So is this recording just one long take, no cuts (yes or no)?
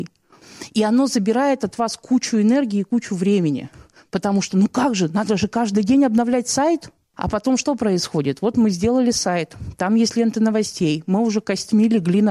yes